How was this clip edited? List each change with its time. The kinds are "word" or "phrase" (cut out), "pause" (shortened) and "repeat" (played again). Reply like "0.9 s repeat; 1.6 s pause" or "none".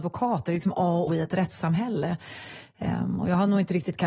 1.1 s word